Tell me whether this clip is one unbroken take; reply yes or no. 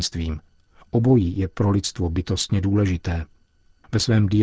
yes